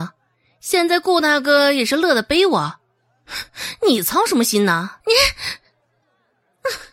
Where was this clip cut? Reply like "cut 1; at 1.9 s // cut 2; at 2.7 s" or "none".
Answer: cut 1; at 5.0 s